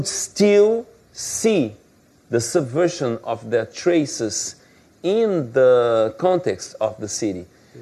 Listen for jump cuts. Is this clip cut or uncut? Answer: uncut